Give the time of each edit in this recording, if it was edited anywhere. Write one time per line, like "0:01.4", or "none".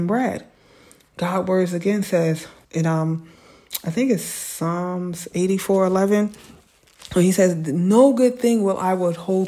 0:02.6